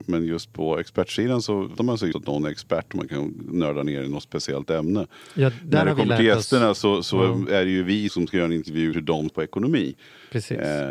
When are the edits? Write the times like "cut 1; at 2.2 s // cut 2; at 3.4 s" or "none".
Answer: cut 1; at 1.8 s // cut 2; at 2.1 s // cut 3; at 8.1 s // cut 4; at 8.9 s // cut 5; at 9.3 s